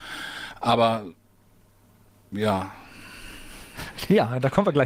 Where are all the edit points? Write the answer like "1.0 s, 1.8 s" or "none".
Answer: none